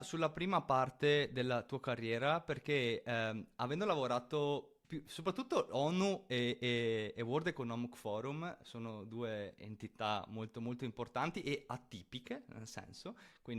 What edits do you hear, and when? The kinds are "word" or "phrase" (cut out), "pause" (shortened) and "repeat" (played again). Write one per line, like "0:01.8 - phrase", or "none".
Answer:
0:04.8 - pause